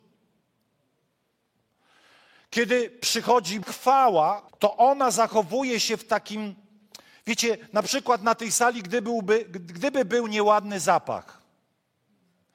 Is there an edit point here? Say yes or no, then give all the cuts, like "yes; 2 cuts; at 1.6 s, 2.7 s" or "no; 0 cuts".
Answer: yes; 2 cuts; at 3.6 s, 4.5 s